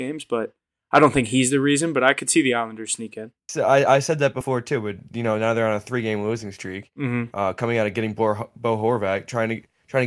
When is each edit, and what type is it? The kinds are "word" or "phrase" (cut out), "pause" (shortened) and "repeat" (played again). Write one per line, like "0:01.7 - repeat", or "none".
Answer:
0:03.4 - pause